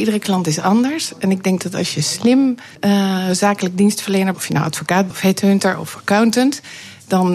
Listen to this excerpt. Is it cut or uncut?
cut